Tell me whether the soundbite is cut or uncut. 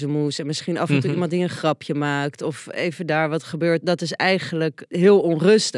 uncut